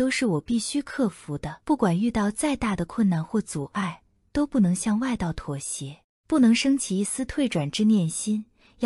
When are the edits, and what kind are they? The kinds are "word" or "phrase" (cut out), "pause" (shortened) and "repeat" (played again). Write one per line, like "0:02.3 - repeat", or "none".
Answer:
0:01.6 - pause